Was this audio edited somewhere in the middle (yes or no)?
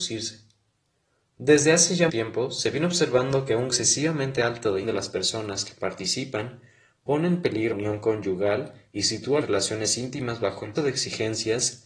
yes